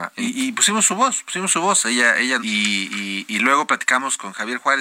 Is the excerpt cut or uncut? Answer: cut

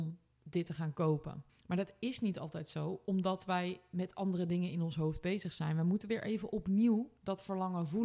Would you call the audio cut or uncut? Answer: cut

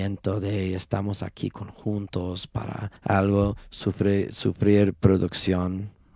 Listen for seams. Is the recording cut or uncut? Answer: cut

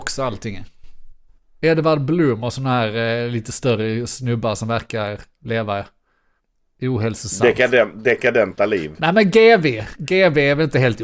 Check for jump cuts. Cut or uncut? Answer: cut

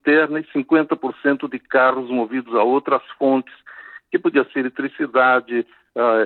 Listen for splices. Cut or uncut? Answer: uncut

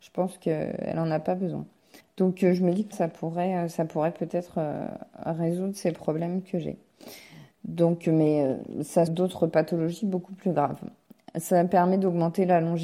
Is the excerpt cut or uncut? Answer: cut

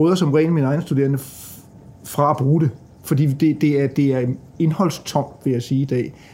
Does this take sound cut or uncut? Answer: uncut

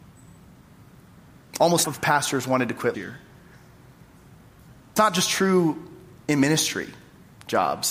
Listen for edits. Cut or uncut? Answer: cut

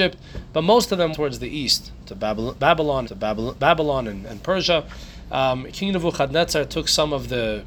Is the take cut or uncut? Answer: cut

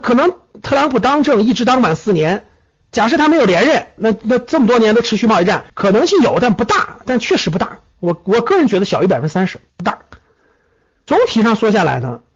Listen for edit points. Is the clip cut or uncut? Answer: cut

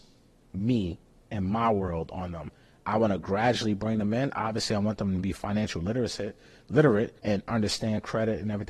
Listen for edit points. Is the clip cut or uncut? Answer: cut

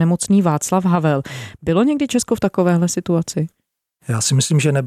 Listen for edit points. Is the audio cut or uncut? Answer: uncut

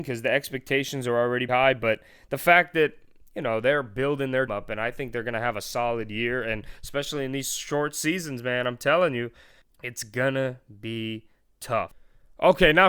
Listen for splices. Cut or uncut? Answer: cut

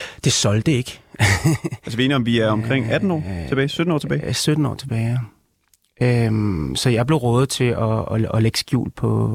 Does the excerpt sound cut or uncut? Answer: uncut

